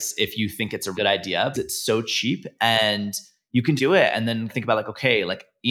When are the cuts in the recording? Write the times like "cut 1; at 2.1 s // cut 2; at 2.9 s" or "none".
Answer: cut 1; at 0.9 s // cut 2; at 1.5 s // cut 3; at 3.8 s // cut 4; at 4.5 s